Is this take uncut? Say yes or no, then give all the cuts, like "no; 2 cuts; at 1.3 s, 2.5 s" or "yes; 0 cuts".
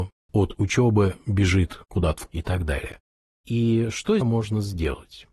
no; 3 cuts; at 1.9 s, 2.3 s, 4.2 s